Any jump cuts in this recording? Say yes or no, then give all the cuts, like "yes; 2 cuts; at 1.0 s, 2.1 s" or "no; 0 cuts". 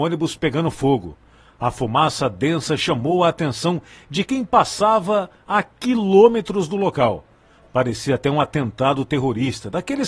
no; 0 cuts